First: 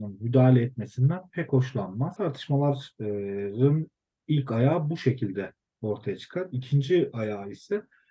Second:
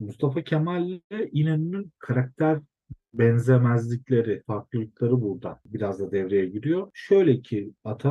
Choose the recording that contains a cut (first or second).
second